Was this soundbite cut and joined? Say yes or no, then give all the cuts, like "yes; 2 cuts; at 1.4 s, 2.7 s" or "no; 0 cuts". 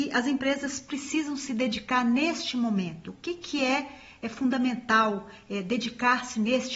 no; 0 cuts